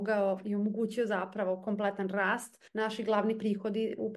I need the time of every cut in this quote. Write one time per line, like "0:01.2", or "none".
0:02.7